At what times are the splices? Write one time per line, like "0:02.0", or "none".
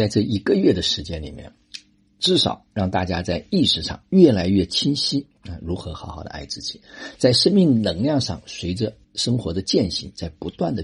0:09.0

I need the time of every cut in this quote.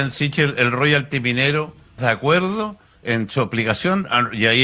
0:02.0
0:03.0

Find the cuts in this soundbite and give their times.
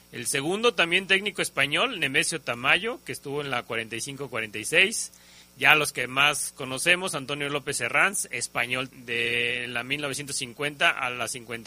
0:08.9

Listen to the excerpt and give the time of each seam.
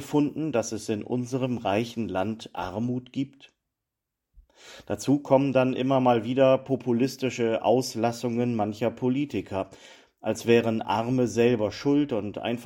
none

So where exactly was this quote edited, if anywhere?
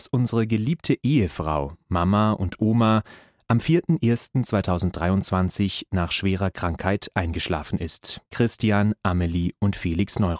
0:08.3

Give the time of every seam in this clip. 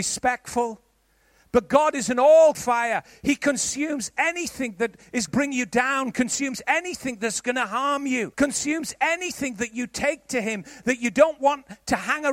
0:02.5
0:05.3
0:08.3

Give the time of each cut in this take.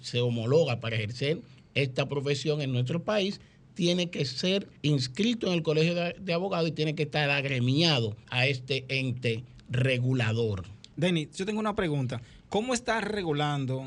0:04.8
0:08.2
0:10.9

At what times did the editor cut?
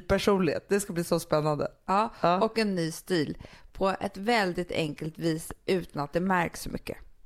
none

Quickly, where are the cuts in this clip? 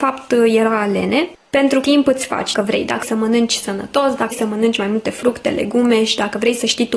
0:01.8
0:02.5
0:03.0
0:04.3

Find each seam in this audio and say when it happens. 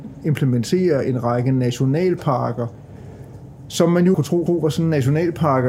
0:04.1
0:04.5

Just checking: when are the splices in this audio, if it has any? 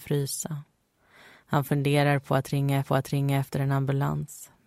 0:02.8

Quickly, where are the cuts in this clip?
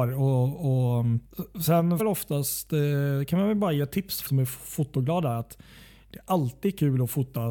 0:02.0
0:04.3

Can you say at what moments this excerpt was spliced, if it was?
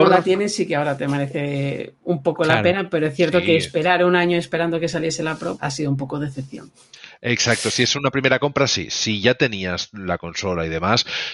0:05.6

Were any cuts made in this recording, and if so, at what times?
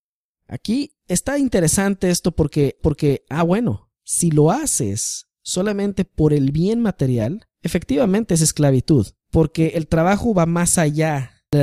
0:02.8
0:03.9
0:07.5
0:09.2

